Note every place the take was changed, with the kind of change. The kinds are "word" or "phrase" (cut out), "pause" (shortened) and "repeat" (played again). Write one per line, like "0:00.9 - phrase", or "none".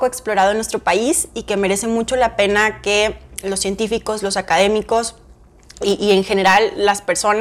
none